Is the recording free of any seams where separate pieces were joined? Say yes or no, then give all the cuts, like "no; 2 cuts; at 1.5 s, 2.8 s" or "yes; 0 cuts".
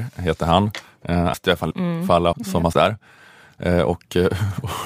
no; 4 cuts; at 1.3 s, 1.7 s, 2.3 s, 2.7 s